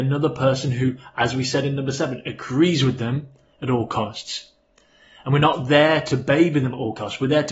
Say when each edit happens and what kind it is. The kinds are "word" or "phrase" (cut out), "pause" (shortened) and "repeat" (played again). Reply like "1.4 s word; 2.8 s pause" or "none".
none